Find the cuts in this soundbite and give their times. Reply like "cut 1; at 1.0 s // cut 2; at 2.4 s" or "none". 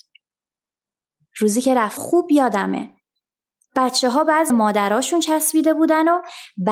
cut 1; at 2.0 s // cut 2; at 4.5 s